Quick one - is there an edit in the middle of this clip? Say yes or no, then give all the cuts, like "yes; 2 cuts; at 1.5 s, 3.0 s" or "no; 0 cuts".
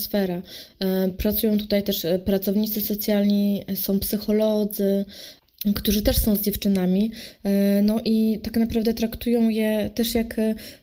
no; 0 cuts